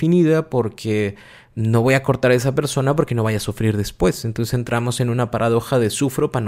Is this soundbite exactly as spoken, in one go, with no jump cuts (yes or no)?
yes